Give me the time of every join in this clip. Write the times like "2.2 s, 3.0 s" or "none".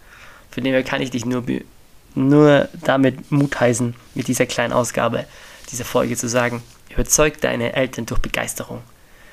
none